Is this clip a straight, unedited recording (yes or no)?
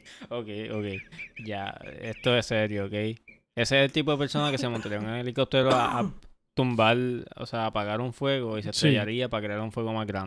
yes